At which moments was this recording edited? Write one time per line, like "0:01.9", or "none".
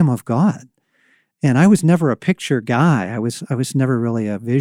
none